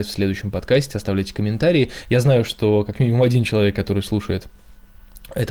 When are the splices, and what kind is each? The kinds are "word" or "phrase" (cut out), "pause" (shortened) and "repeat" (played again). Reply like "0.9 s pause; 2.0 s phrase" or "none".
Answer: none

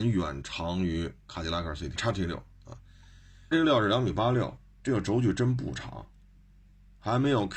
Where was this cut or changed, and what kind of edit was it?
1.2 s pause; 2.0 s phrase; 3.5 s word

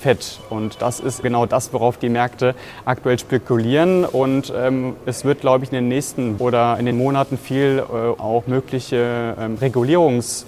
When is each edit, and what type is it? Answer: 1.2 s word; 6.4 s word; 6.9 s word; 8.2 s word

